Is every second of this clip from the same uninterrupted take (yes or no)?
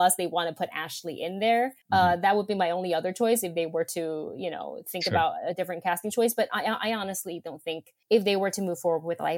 no